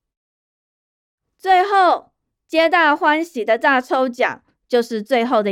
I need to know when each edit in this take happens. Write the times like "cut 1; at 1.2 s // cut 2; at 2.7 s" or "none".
none

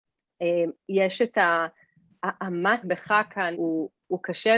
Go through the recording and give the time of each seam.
cut 1; at 2.8 s // cut 2; at 3.5 s

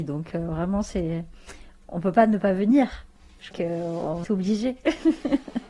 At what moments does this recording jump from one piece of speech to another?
cut 1; at 3.5 s // cut 2; at 4.2 s

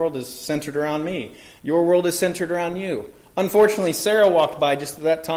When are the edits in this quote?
none

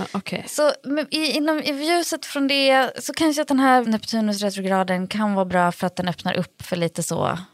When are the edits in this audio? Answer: cut 1; at 3.8 s

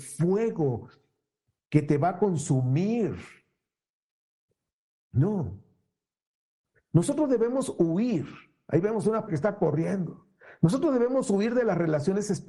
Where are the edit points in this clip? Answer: cut 1; at 9.3 s

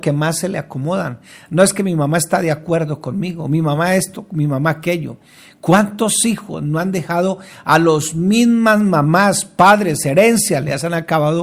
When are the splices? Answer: none

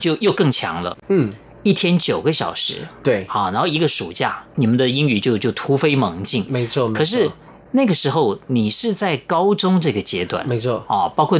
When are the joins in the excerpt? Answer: none

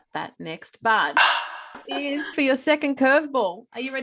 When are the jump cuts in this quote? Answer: cut 1; at 1.8 s // cut 2; at 2.3 s

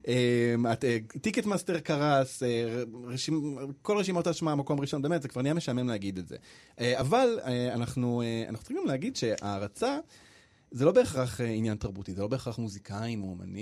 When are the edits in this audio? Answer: none

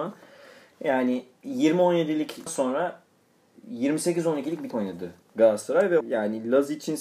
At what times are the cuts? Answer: cut 1; at 2.5 s // cut 2; at 4.7 s // cut 3; at 6.0 s

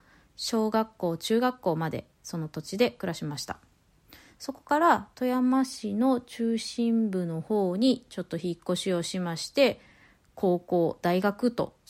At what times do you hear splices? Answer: none

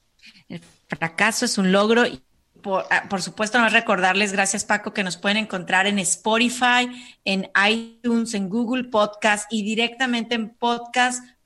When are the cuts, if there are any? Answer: none

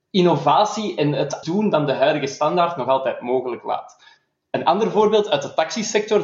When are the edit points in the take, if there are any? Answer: cut 1; at 1.4 s

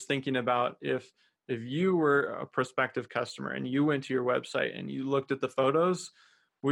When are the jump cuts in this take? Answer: none

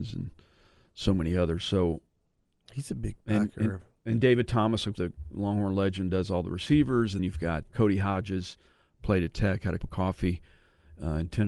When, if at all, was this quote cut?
cut 1; at 4.9 s // cut 2; at 7.2 s // cut 3; at 7.7 s // cut 4; at 9.8 s

